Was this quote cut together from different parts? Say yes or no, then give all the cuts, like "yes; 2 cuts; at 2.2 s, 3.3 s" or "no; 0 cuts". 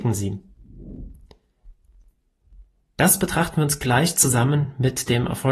no; 0 cuts